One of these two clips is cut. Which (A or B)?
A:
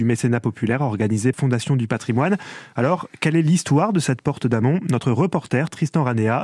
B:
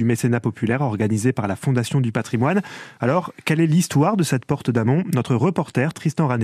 A